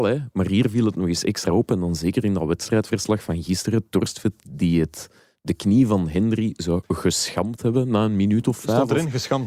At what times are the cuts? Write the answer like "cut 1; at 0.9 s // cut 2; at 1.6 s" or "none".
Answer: none